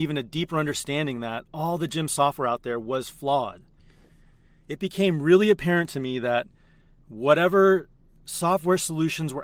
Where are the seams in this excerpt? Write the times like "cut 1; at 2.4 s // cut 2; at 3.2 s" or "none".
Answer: none